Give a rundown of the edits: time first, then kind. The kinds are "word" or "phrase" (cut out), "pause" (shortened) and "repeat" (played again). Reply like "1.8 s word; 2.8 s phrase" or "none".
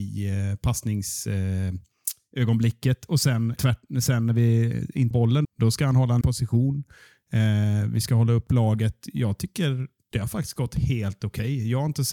3.6 s word; 5.1 s word; 5.4 s word; 6.2 s word